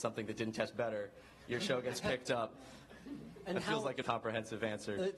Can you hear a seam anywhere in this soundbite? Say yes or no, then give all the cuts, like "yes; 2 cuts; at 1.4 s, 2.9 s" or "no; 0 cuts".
yes; 1 cut; at 4.0 s